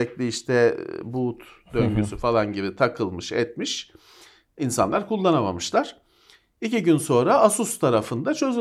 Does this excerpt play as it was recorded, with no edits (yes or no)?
yes